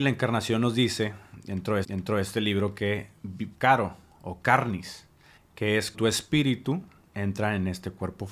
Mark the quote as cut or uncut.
cut